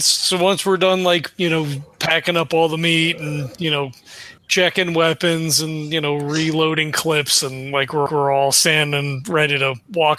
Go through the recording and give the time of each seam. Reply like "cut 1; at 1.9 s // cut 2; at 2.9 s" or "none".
cut 1; at 4.4 s // cut 2; at 8.1 s